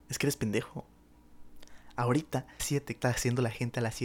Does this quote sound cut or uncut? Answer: cut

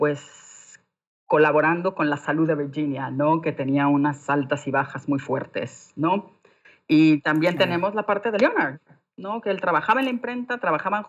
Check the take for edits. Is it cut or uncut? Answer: uncut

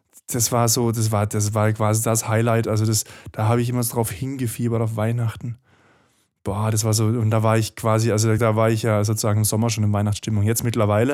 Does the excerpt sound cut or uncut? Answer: cut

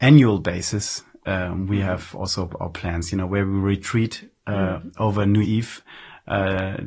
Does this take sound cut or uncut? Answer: cut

